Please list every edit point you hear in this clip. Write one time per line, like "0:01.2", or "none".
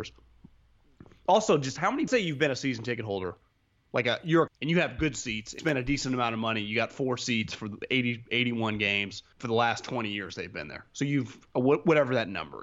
0:02.1
0:04.5
0:05.6
0:09.3